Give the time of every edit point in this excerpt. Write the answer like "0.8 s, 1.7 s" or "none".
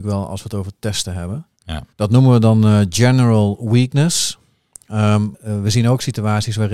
1.9 s, 5.3 s